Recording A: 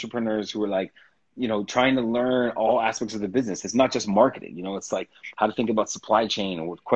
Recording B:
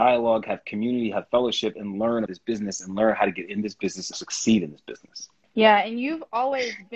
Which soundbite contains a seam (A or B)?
B